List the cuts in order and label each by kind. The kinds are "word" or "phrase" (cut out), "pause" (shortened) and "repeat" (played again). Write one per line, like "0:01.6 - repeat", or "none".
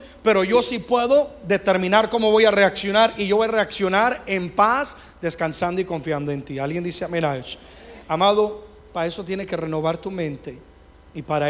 0:08.0 - pause